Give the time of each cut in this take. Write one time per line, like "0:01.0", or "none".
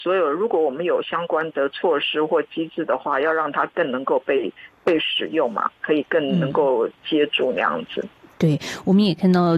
none

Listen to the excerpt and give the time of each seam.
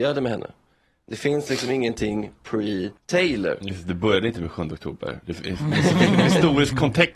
0:03.0

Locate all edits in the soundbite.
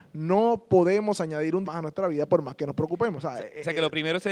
0:01.6

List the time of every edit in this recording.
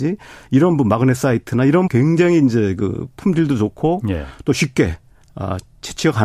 0:01.9

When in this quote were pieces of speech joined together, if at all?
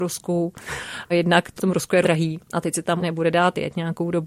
0:01.1
0:01.6
0:02.0
0:03.0

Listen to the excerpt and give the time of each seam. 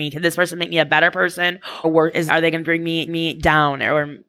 0:01.8
0:02.3
0:03.1

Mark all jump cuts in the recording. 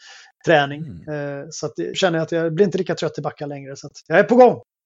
0:01.9

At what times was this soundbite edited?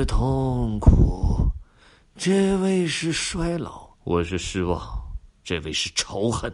0:04.0

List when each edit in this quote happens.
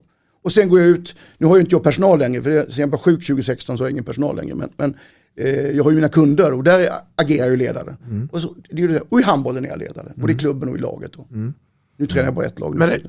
none

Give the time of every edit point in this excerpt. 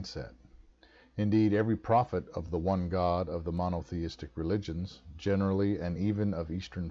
none

